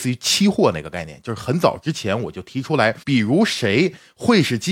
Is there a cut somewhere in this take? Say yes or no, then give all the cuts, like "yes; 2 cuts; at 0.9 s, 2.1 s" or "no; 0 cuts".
yes; 1 cut; at 3.0 s